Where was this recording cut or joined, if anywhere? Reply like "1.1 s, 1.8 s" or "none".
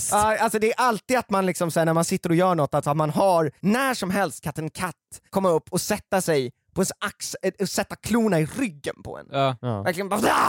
3.6 s, 5.3 s